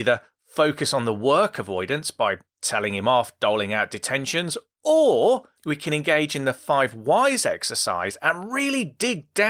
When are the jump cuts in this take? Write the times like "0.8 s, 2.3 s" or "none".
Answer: 5.6 s